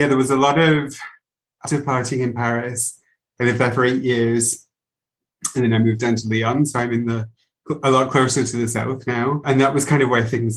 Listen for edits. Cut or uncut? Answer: cut